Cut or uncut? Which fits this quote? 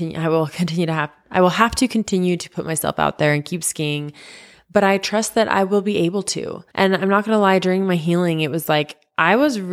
cut